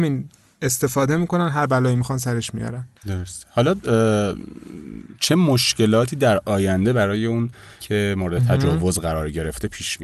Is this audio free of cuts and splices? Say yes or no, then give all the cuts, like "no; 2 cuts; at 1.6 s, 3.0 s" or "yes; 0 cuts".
no; 2 cuts; at 3.0 s, 7.8 s